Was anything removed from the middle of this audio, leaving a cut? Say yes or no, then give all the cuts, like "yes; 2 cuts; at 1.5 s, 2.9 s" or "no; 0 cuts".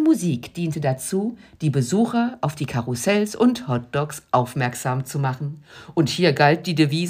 no; 0 cuts